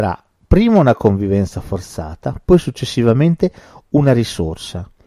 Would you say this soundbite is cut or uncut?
uncut